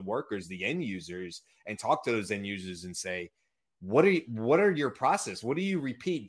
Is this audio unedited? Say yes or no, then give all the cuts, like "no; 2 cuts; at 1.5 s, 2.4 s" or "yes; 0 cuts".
yes; 0 cuts